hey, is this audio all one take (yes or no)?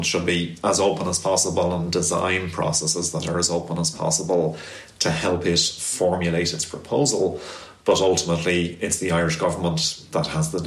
yes